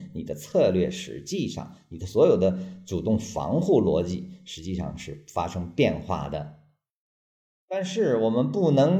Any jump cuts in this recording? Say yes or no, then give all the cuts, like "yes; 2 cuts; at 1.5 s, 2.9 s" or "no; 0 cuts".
no; 0 cuts